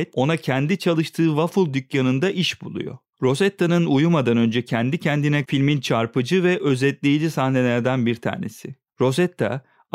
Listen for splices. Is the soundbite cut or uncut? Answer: cut